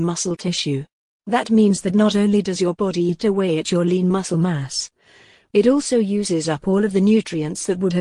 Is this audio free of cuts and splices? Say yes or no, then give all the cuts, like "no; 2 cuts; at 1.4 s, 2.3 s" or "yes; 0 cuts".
yes; 0 cuts